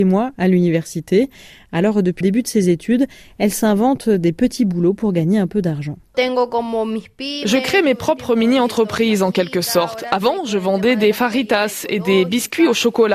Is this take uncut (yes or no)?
no